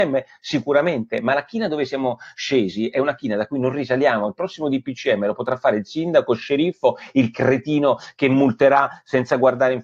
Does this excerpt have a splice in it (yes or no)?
no